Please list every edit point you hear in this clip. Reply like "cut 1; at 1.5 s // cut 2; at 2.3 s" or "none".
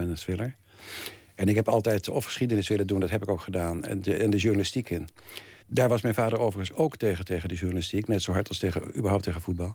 cut 1; at 5.6 s

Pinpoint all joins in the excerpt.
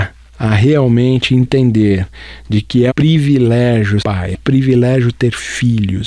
cut 1; at 2.9 s // cut 2; at 4.0 s // cut 3; at 4.3 s

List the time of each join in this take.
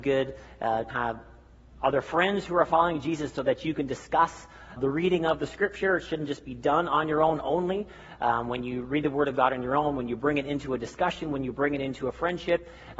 cut 1; at 0.9 s // cut 2; at 4.8 s

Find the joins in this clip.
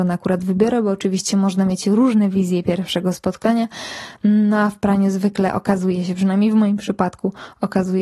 none

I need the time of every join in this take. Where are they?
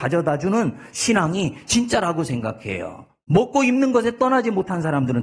none

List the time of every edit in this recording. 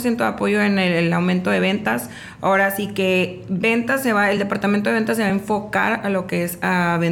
none

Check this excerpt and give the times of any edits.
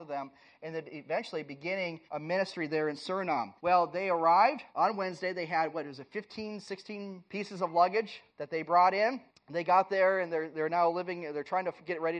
cut 1; at 2.1 s // cut 2; at 3.6 s // cut 3; at 4.7 s // cut 4; at 7.3 s // cut 5; at 8.3 s // cut 6; at 9.3 s

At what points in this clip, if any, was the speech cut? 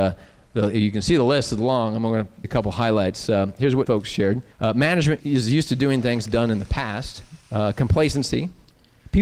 cut 1; at 2.4 s // cut 2; at 3.9 s // cut 3; at 4.5 s // cut 4; at 5.2 s // cut 5; at 6.2 s // cut 6; at 7.4 s

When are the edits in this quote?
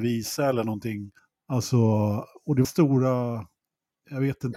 cut 1; at 1.2 s // cut 2; at 2.6 s

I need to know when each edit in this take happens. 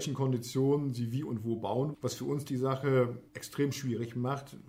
cut 1; at 1.9 s // cut 2; at 3.3 s

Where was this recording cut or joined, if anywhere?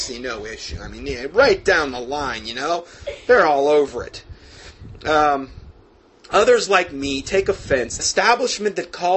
cut 1; at 8.0 s

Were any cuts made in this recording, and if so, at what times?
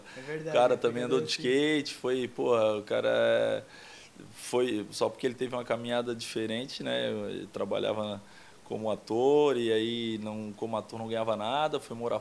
none

